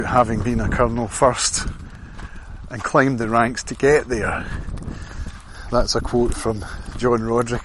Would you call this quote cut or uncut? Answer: uncut